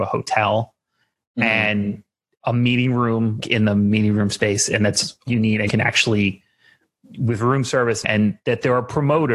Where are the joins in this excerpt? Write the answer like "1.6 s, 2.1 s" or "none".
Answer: 3.4 s, 5.3 s, 5.7 s, 8.0 s